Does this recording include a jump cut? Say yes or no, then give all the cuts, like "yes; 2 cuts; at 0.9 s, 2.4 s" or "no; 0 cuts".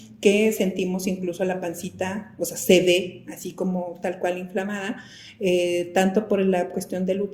no; 0 cuts